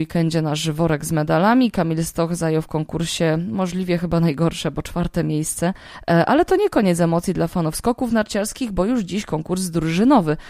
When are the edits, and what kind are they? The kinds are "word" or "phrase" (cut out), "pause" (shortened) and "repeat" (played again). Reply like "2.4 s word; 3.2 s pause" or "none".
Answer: none